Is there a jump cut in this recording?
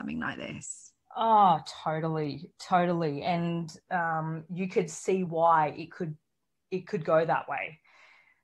no; 0 cuts

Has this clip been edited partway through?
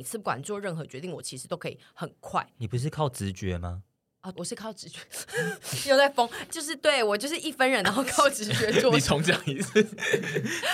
yes; 2 cuts; at 4.3 s, 6.5 s

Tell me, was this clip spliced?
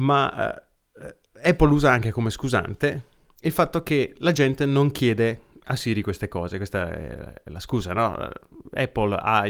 no; 0 cuts

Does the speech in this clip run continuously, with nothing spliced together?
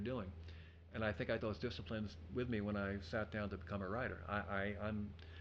no; 1 cut; at 1.4 s

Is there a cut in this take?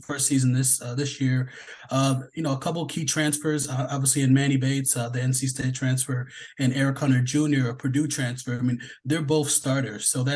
no; 0 cuts

